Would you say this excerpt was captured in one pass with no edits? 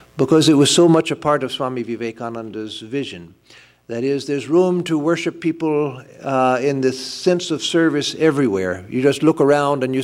yes; 0 cuts

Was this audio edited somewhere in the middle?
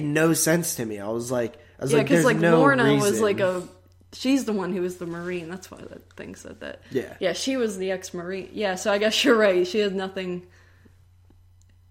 no; 0 cuts

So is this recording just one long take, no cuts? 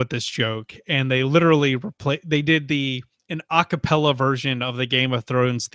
yes; 0 cuts

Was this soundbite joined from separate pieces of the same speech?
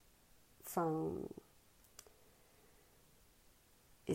no; 0 cuts

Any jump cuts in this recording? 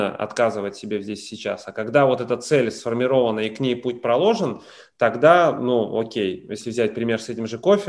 no; 0 cuts

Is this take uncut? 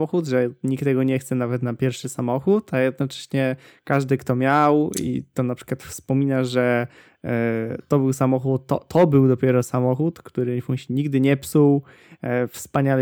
yes; 0 cuts

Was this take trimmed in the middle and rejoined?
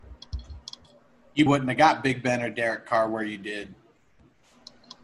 yes; 1 cut; at 1.5 s

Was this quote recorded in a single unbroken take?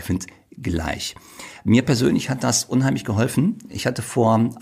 yes; 0 cuts

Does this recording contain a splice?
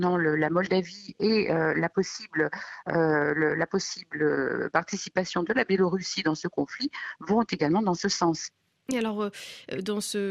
no; 0 cuts

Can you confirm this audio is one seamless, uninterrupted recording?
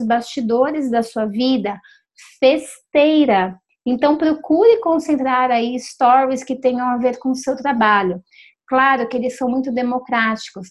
yes; 0 cuts

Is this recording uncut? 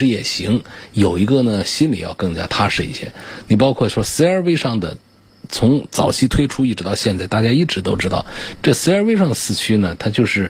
yes; 0 cuts

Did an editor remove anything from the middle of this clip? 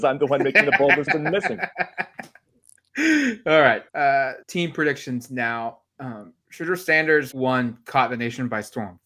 yes; 4 cuts; at 1.1 s, 3.9 s, 4.4 s, 7.3 s

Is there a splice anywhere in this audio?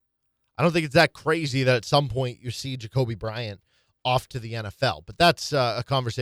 no; 0 cuts

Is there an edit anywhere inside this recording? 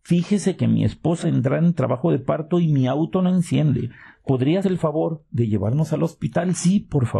yes; 2 cuts; at 1.2 s, 4.6 s

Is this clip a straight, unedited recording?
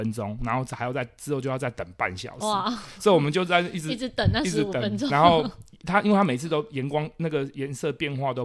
no; 1 cut; at 5.1 s

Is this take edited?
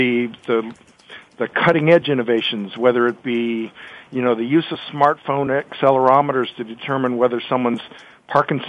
no; 0 cuts

